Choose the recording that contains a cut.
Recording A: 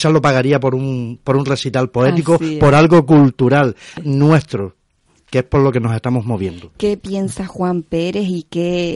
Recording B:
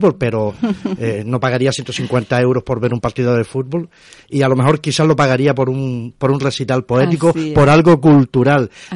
A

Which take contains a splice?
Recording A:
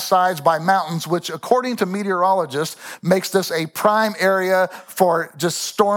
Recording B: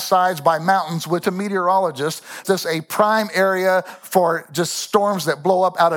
B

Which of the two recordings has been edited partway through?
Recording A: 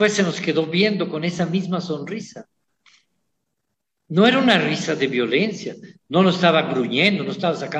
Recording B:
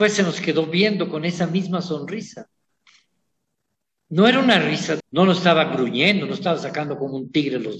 B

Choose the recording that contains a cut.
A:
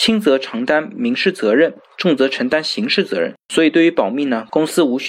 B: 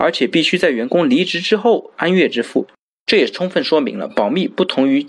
A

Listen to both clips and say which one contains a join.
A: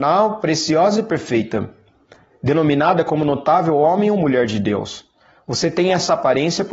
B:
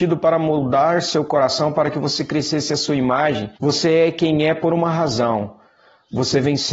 B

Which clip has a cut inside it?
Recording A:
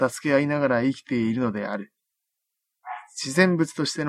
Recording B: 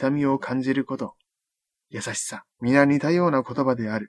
B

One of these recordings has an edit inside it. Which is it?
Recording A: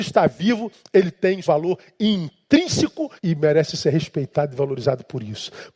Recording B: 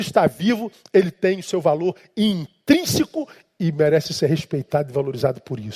A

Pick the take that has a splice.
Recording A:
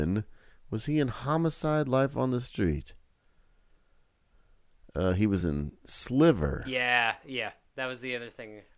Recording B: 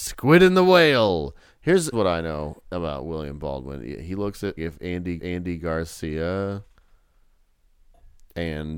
B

